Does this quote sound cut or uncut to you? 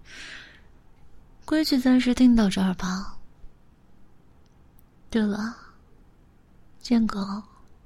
uncut